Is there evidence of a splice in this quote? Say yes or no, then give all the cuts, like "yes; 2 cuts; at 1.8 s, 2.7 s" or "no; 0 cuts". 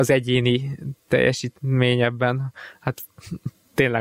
no; 0 cuts